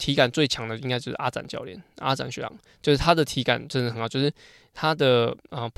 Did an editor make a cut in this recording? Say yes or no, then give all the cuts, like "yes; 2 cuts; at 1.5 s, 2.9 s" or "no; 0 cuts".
no; 0 cuts